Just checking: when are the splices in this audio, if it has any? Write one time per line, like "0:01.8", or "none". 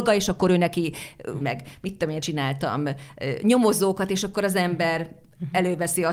0:01.4
0:02.2